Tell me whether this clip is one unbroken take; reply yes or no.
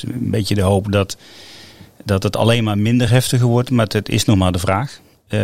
yes